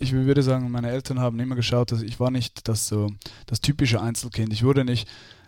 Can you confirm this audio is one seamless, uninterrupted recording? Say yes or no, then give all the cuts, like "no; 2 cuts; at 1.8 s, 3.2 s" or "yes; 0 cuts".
yes; 0 cuts